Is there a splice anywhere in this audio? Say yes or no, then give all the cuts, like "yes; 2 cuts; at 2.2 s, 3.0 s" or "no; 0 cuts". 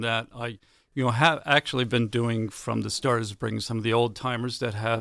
no; 0 cuts